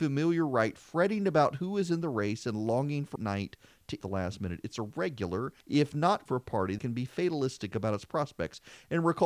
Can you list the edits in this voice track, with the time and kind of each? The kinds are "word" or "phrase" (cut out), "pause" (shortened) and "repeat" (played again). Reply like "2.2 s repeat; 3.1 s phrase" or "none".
3.2 s phrase; 4.0 s phrase; 5.6 s pause; 6.3 s phrase; 6.8 s word